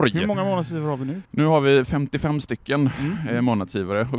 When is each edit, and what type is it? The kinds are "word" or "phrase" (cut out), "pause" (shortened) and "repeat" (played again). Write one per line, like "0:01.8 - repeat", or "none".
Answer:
0:01.2 - pause